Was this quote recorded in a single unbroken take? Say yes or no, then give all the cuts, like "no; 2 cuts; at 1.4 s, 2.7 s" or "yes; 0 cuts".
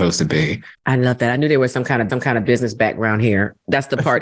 no; 1 cut; at 2.1 s